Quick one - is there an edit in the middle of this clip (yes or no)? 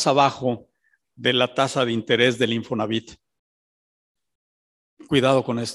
no